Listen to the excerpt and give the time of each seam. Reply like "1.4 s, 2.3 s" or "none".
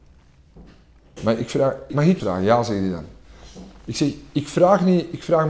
1.9 s, 2.2 s